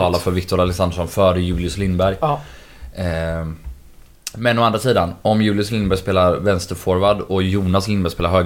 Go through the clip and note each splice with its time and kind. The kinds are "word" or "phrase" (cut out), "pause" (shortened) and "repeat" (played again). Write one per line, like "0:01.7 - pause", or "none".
none

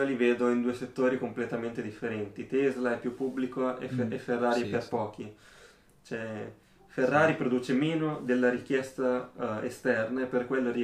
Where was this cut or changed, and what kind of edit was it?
none

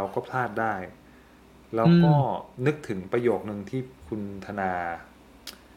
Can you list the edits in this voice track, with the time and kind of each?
none

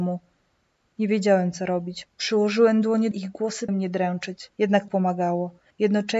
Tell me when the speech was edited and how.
0:03.1 - phrase
0:03.7 - word
0:04.5 - pause
0:04.9 - word

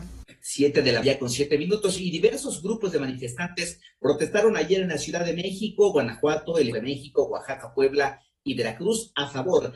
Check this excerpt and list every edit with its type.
0:01.0 - word
0:06.7 - word

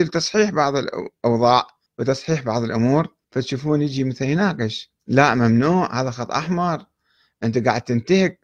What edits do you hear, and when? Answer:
0:01.9 - pause
0:03.2 - pause
0:05.0 - pause

